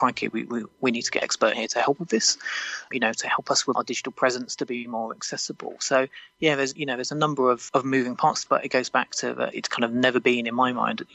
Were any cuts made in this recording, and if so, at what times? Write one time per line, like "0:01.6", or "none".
0:01.2
0:01.5
0:02.0
0:02.9
0:03.7
0:06.8
0:07.7
0:08.5
0:09.5